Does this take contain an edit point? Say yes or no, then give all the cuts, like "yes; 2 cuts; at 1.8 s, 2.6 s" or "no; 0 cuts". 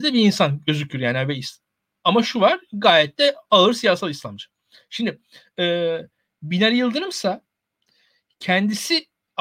no; 0 cuts